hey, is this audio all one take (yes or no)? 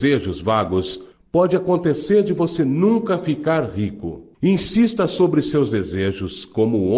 yes